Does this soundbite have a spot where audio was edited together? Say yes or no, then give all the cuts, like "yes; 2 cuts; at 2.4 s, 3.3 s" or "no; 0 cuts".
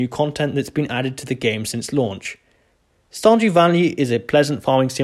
no; 0 cuts